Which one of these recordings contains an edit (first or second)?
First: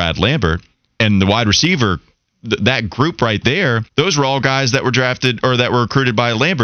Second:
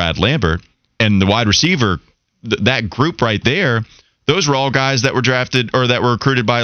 first